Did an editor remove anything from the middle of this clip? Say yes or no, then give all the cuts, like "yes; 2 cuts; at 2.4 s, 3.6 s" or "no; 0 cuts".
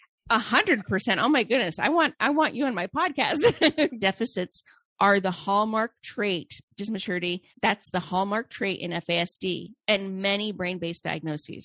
yes; 3 cuts; at 4.0 s, 6.7 s, 7.5 s